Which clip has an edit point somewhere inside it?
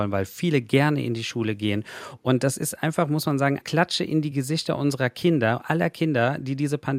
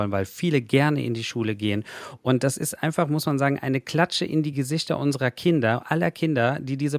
first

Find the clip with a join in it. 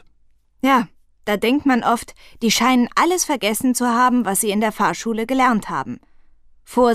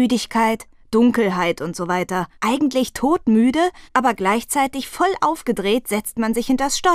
second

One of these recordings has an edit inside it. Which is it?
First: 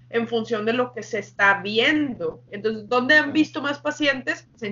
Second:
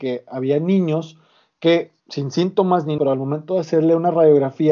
second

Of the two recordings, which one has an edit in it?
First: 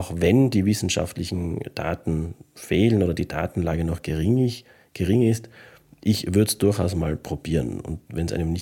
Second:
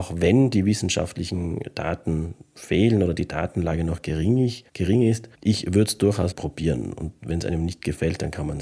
second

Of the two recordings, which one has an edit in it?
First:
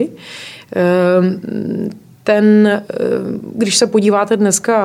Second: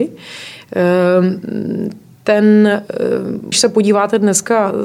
second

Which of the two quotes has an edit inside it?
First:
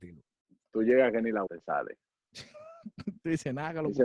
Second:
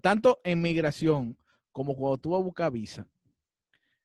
first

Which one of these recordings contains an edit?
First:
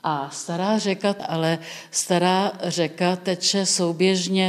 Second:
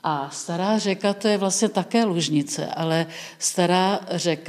first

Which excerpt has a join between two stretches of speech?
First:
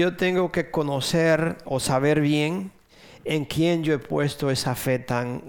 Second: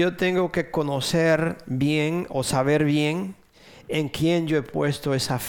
first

